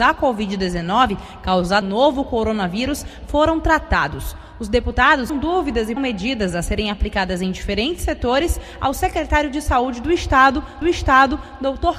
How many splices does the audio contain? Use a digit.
4